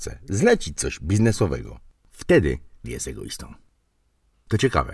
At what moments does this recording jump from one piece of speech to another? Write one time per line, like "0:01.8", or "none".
0:02.8